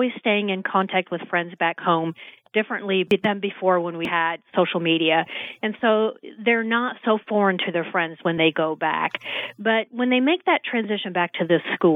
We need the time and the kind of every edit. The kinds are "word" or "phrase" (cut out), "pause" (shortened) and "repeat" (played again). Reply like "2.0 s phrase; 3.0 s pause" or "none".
none